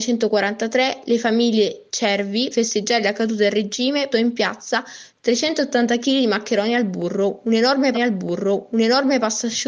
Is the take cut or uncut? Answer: cut